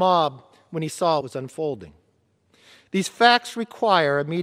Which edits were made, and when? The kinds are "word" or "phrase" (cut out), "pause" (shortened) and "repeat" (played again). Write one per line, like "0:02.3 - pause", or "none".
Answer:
0:01.2 - word